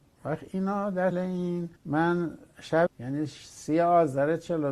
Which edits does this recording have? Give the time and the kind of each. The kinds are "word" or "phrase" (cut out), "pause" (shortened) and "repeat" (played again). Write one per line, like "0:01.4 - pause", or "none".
0:01.1 - word
0:01.8 - pause
0:02.9 - word